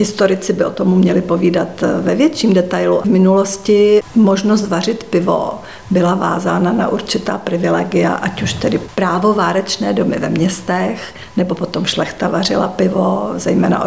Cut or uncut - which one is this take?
cut